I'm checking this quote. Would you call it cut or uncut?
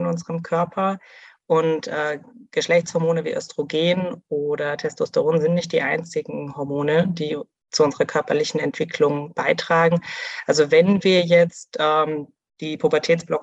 uncut